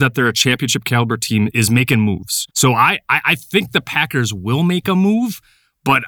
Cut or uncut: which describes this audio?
cut